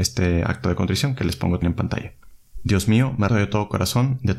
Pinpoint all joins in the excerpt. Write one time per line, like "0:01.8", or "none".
0:01.6
0:03.3